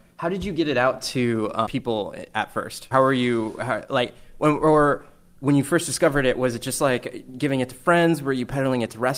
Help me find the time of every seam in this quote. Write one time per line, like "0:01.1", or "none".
0:01.7
0:02.9